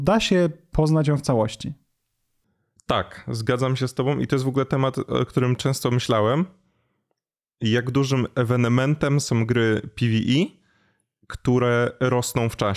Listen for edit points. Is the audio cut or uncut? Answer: uncut